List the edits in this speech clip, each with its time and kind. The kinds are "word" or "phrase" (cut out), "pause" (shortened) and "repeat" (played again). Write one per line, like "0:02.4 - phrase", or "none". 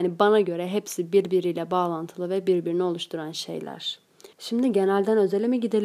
0:04.3 - pause